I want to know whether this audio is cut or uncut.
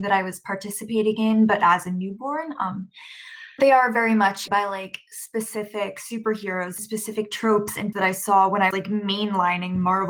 cut